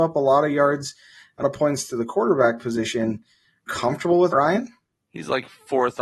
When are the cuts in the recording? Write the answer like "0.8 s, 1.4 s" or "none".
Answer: 1.4 s, 3.7 s, 4.3 s